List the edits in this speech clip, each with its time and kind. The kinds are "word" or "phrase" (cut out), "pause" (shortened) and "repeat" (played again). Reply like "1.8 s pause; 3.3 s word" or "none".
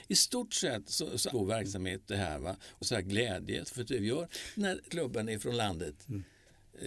1.3 s word; 2.0 s word; 2.8 s word; 3.6 s word; 4.0 s word; 4.9 s word

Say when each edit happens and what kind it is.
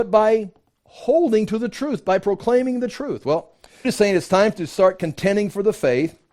3.8 s word

